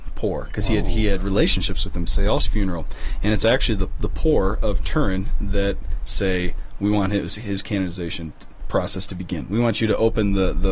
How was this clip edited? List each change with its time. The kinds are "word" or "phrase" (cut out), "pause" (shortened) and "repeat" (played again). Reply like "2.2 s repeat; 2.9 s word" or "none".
2.4 s phrase